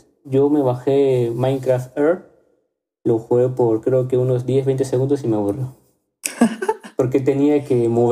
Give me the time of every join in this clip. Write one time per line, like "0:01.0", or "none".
none

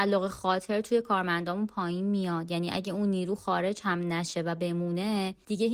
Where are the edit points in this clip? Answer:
none

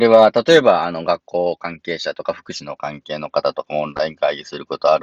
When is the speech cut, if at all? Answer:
none

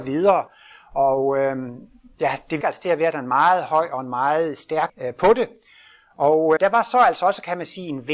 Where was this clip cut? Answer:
0:02.6
0:04.9
0:06.6

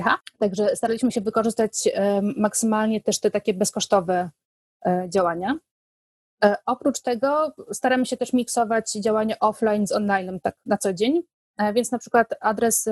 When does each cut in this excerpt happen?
none

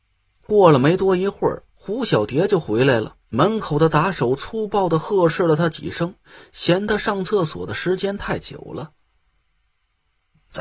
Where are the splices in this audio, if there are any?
0:03.3

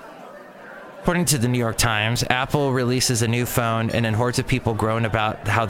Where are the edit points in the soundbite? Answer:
none

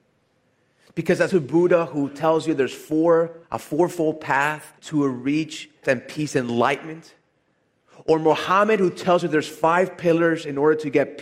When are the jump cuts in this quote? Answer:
0:01.3
0:03.4
0:04.8
0:05.8

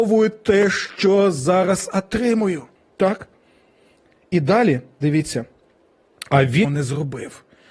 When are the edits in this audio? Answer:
0:02.7
0:06.6

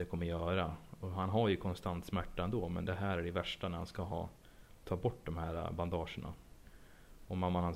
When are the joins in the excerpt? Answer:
none

